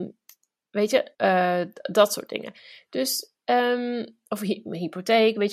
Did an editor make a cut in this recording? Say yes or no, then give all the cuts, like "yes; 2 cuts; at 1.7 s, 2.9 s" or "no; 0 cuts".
yes; 1 cut; at 1.1 s